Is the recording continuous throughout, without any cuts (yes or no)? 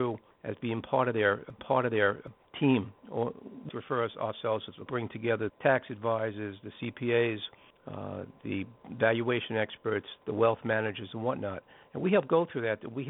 no